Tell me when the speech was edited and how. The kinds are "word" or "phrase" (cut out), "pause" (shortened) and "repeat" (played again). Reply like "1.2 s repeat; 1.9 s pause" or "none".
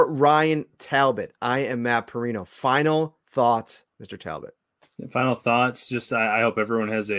3.2 s pause